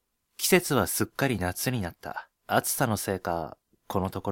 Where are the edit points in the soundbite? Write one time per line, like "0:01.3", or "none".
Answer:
0:02.4

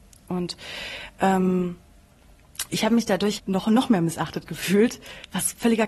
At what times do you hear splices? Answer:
0:03.4

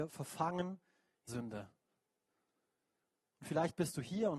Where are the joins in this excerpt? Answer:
0:01.3

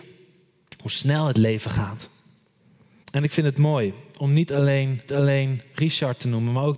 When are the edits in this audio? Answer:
0:03.0
0:05.1

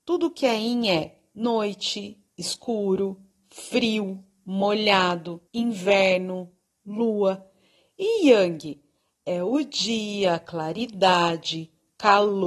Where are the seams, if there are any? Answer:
0:05.5

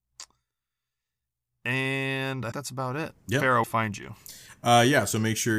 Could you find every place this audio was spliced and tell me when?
0:02.5
0:03.2
0:03.6

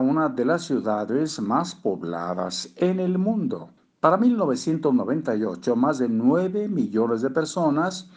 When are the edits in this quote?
0:03.8

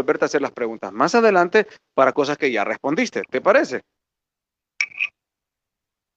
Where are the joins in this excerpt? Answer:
none

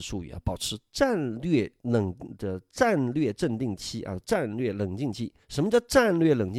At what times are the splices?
0:01.8
0:05.4

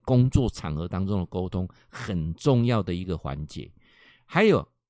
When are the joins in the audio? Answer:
none

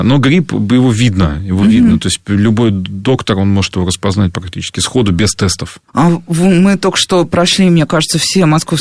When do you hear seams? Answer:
0:05.9

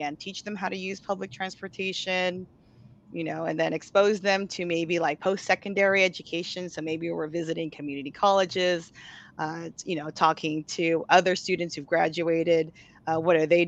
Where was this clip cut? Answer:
none

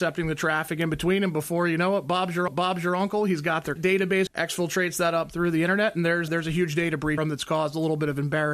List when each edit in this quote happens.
0:02.5
0:03.8
0:04.3
0:06.3
0:07.2

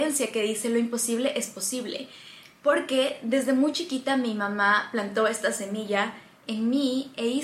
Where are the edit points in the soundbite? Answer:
none

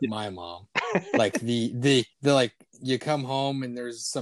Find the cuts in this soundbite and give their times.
0:02.1

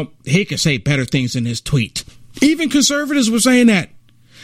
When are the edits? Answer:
0:02.2

